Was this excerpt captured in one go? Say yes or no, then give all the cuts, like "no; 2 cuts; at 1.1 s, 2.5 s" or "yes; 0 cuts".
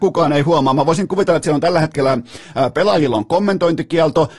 yes; 0 cuts